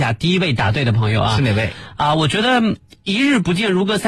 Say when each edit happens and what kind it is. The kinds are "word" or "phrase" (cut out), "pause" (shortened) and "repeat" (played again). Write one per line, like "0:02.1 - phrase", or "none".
none